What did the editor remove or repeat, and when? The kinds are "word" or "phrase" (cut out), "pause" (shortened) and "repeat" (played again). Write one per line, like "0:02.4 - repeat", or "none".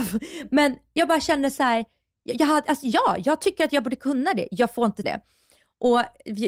0:05.0 - word